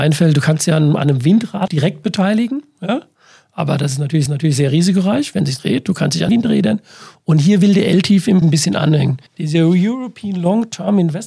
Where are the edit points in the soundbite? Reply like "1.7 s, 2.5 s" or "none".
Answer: 1.7 s, 4.3 s, 5.6 s, 6.3 s, 8.4 s, 9.3 s

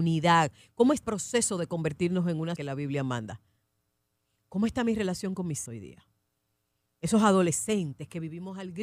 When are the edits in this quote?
1.0 s, 2.6 s, 5.7 s

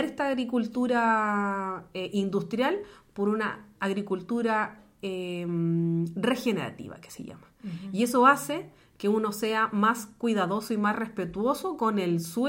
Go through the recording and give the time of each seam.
none

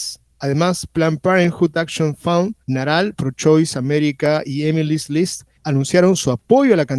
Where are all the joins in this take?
2.6 s, 5.6 s

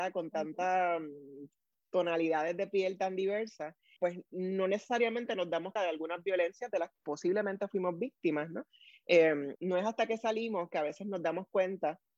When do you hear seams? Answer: 4.0 s, 5.8 s, 6.9 s, 9.6 s

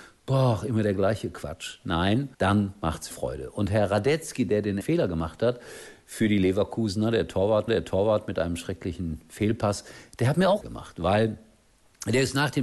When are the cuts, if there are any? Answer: 2.3 s, 3.1 s, 4.8 s, 7.7 s, 10.6 s

